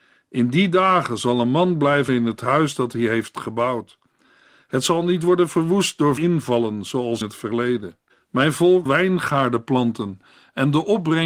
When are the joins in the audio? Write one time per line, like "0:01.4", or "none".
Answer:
0:02.1
0:06.2
0:07.2
0:08.1
0:08.9